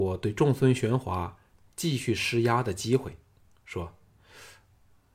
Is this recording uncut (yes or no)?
yes